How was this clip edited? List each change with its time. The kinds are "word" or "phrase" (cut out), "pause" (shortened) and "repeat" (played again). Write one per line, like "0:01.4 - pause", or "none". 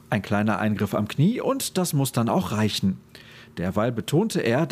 none

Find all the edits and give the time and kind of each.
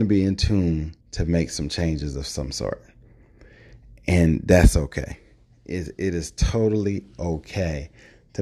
0:01.0 - pause

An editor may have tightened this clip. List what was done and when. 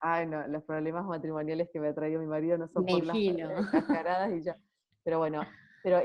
0:03.0 - word

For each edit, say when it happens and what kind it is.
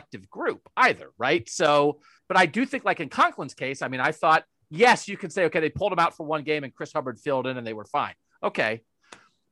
none

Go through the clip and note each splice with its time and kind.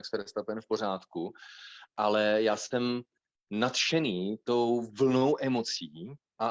none

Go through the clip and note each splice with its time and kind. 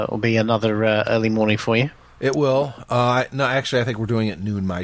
none

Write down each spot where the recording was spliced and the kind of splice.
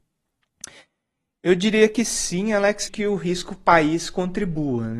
0:02.9 - word

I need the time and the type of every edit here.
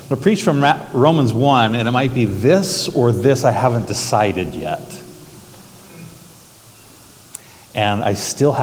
none

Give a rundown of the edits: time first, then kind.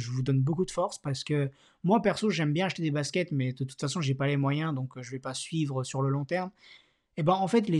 none

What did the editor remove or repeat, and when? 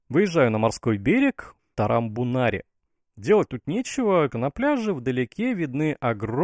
0:01.7 - word
0:04.3 - word

